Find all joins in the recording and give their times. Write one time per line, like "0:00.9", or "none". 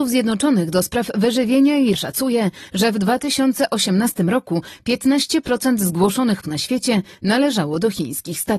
0:01.9
0:06.4